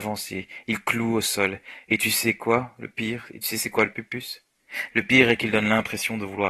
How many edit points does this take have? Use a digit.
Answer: 1